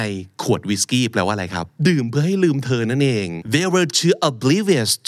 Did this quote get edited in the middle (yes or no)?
no